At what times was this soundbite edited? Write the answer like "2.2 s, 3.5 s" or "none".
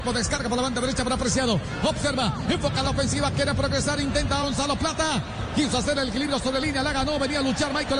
2.8 s, 4.4 s, 6.6 s